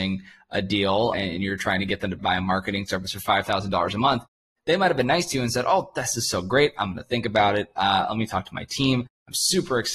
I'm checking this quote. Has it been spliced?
yes; 2 cuts; at 1.1 s, 2.2 s

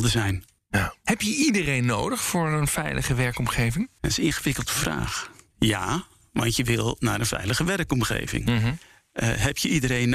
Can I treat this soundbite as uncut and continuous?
yes; 0 cuts

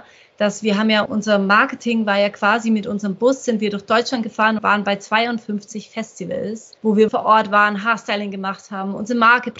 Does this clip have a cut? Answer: yes; 4 cuts; at 1.1 s, 4.6 s, 6.8 s, 7.1 s

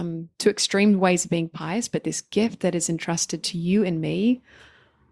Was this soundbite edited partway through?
no; 0 cuts

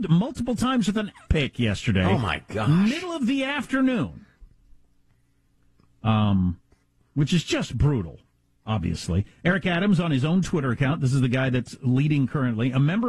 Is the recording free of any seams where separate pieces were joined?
no; 1 cut; at 1.3 s

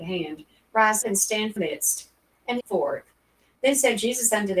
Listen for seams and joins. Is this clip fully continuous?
no; 3 cuts; at 1.0 s, 1.6 s, 2.6 s

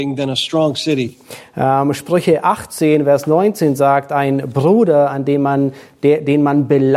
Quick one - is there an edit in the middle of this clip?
no; 0 cuts

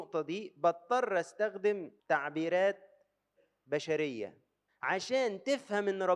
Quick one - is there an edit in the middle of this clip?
yes; 2 cuts; at 2.0 s, 4.7 s

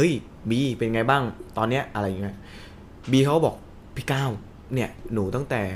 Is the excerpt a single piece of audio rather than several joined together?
no; 1 cut; at 4.6 s

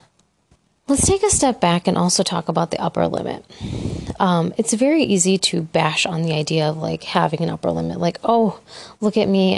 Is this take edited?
no; 0 cuts

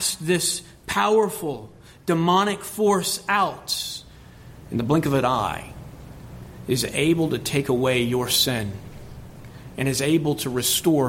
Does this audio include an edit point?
no; 0 cuts

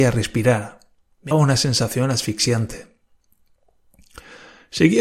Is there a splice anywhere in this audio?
yes; 1 cut; at 1.3 s

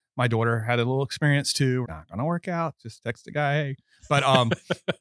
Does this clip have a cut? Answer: yes; 1 cut; at 1.8 s

